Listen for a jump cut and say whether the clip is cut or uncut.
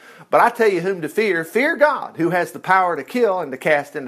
uncut